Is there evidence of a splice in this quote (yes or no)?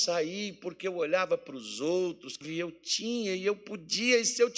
yes